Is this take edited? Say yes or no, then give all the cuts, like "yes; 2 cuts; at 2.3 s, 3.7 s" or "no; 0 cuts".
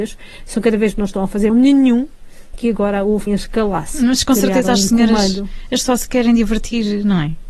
yes; 5 cuts; at 0.9 s, 1.5 s, 2.5 s, 3.3 s, 5.8 s